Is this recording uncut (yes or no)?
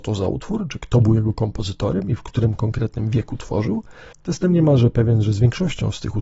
no